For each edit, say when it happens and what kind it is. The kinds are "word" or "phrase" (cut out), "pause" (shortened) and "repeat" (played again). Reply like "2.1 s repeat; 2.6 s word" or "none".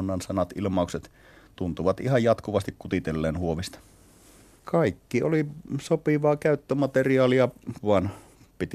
7.8 s word